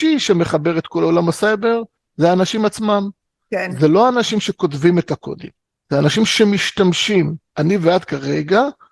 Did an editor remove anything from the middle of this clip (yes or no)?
no